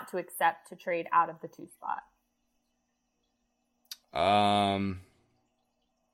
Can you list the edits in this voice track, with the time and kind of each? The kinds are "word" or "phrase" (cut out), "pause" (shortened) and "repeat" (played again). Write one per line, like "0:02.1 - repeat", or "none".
0:04.0 - pause